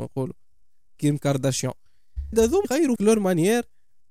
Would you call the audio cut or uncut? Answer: cut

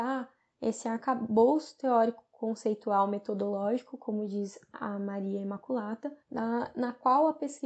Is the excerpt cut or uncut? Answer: cut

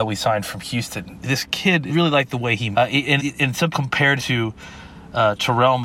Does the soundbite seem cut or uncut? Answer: cut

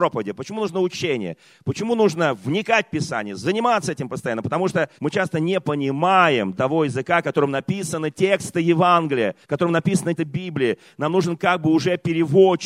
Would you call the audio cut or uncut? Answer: cut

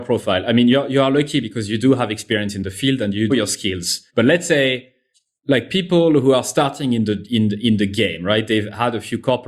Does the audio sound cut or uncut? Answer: cut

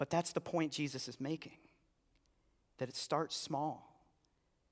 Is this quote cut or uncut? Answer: uncut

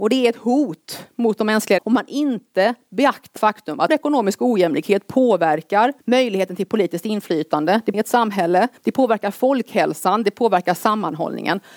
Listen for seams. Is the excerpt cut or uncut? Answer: cut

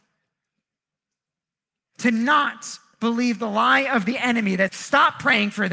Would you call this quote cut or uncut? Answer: cut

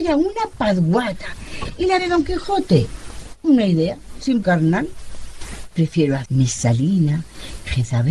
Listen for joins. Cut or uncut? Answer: cut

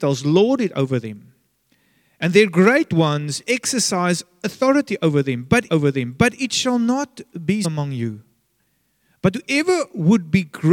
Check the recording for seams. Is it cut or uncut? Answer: cut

